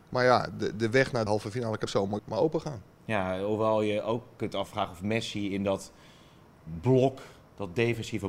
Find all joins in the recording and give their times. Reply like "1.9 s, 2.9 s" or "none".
1.3 s, 1.9 s, 2.2 s